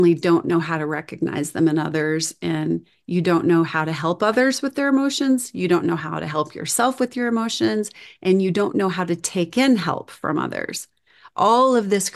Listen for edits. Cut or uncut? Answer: uncut